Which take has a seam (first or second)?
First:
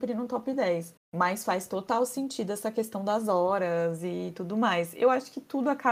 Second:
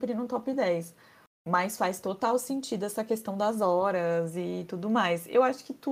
first